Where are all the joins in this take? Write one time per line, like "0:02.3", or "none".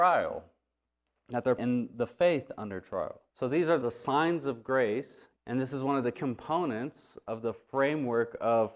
0:01.6
0:03.3
0:03.8
0:05.3
0:06.1